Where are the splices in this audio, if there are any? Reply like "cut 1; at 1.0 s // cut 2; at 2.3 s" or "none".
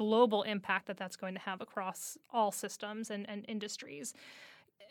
cut 1; at 2.2 s